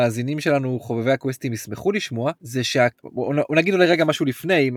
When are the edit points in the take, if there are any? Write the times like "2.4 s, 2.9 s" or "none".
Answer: 2.4 s, 2.9 s